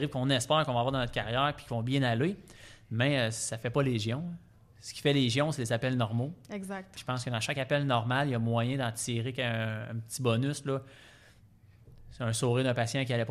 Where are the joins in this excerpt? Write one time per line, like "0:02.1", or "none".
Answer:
none